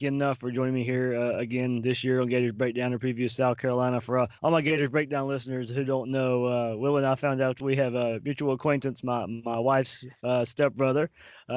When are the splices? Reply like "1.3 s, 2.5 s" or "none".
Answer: 4.4 s